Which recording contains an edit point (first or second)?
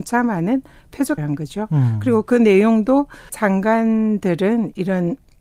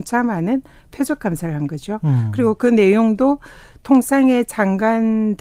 first